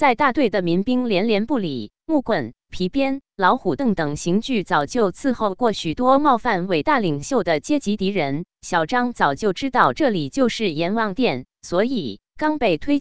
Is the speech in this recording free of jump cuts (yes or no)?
yes